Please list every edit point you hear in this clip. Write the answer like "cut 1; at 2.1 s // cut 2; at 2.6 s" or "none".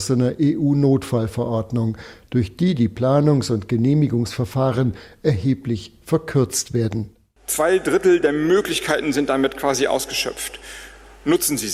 none